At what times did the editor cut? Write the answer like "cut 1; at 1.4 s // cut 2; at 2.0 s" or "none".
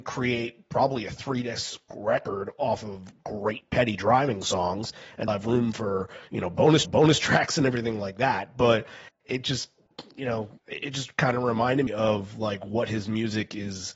cut 1; at 5.3 s // cut 2; at 6.8 s // cut 3; at 10.6 s // cut 4; at 11.9 s

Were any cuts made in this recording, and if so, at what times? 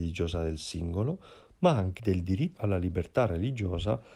cut 1; at 2.0 s // cut 2; at 2.6 s

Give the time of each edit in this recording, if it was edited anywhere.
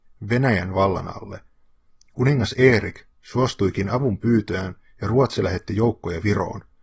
none

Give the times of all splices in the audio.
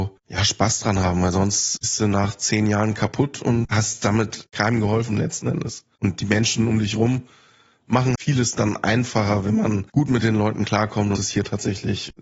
cut 1; at 8.2 s // cut 2; at 9.9 s // cut 3; at 11.2 s

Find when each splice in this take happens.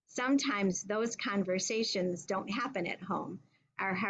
cut 1; at 2.3 s

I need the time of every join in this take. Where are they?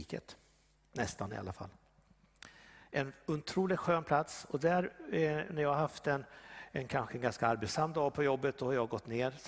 none

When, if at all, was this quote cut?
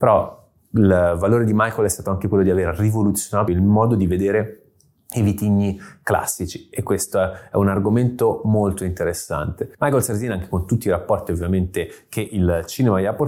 cut 1; at 3.5 s // cut 2; at 9.7 s

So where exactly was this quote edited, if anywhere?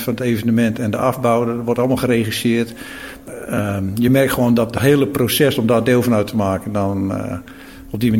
none

